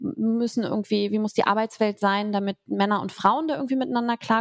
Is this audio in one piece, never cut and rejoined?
yes; 0 cuts

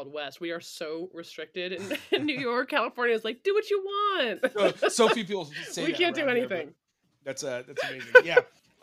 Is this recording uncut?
yes; 0 cuts

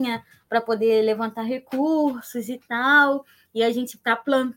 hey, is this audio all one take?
yes; 0 cuts

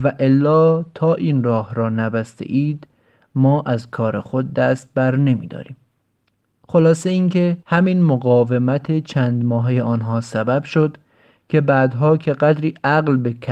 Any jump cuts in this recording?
yes; 1 cut; at 7.6 s

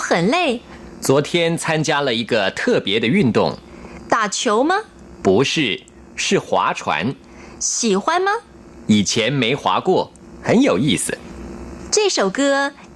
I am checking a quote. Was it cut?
no; 0 cuts

